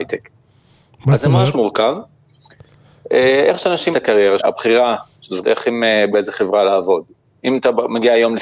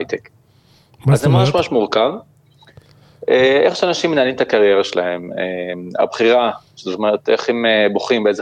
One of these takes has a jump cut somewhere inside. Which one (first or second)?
first